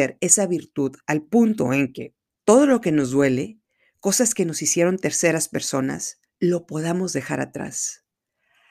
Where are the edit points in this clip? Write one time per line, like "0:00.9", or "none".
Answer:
0:01.0
0:02.3
0:06.2

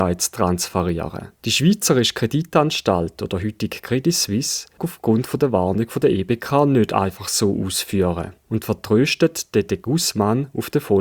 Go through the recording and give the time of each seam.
0:04.8

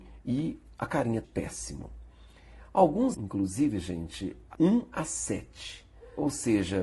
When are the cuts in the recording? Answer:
0:01.2
0:03.1
0:04.5

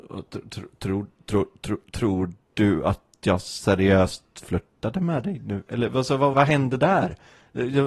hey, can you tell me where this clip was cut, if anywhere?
0:06.3

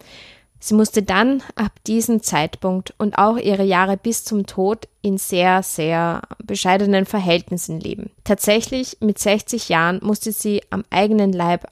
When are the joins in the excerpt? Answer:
0:08.2

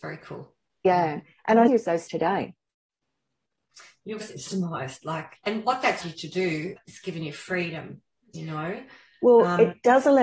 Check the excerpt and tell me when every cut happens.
0:01.7
0:02.1
0:04.2
0:05.3
0:06.0
0:06.8

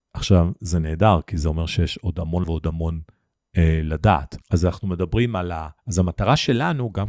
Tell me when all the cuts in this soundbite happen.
0:02.4
0:04.4
0:05.8

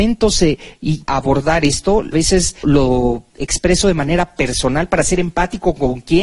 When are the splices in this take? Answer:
0:01.0
0:02.1
0:02.6
0:03.3

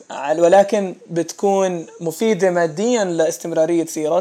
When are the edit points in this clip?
none

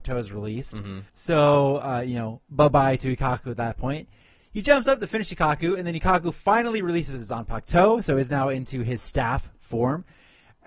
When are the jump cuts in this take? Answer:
0:01.1

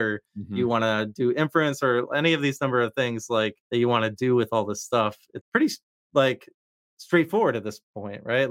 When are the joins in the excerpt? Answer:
0:03.6
0:05.4

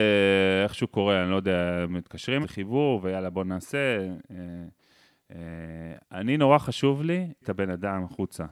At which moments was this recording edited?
0:02.4
0:06.0
0:07.4

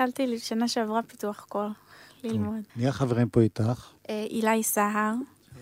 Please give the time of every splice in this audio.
0:02.7
0:04.0

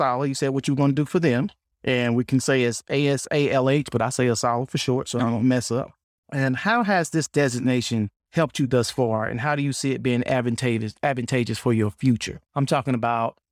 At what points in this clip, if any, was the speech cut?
0:01.7
0:06.0
0:08.2
0:12.4

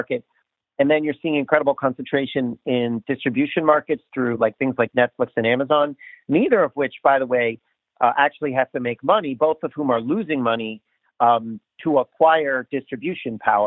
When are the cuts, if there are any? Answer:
none

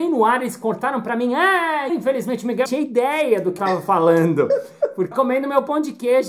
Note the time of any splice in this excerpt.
0:01.9
0:02.7
0:03.6
0:05.1

